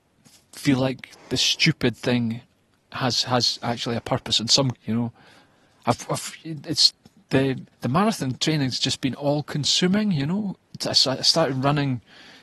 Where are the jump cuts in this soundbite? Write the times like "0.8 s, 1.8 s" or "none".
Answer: 4.7 s, 7.7 s